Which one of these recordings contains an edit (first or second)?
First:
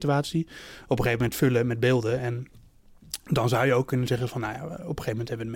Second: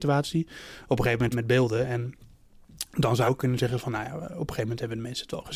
second